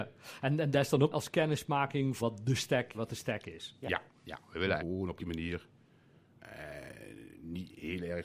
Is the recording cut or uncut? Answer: cut